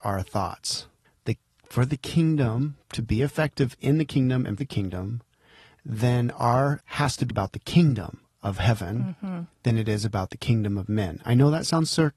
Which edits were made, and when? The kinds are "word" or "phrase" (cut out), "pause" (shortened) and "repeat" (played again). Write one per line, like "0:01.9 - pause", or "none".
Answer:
0:01.0 - pause
0:02.8 - pause
0:04.6 - word
0:06.8 - word
0:07.3 - word